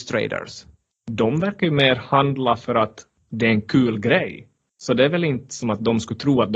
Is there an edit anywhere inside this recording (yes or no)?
no